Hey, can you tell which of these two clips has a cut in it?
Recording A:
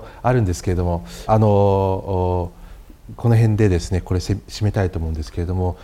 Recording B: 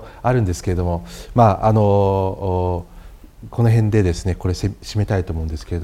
A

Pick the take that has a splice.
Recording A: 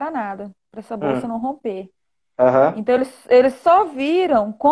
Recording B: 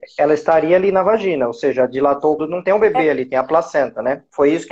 B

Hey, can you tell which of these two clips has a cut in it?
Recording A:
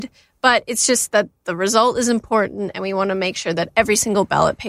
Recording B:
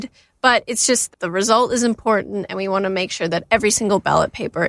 B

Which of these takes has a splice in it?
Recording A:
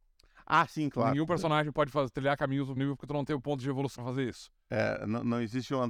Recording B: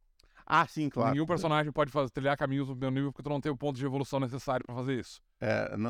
A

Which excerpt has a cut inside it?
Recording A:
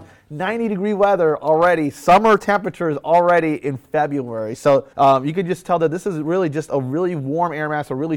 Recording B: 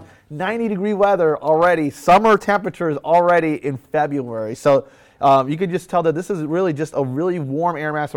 A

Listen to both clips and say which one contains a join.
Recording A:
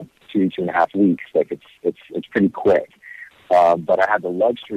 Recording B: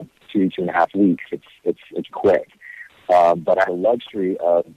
B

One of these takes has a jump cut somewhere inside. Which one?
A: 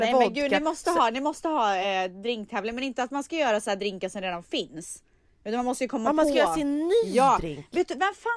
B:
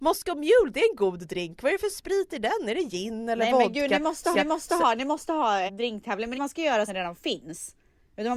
B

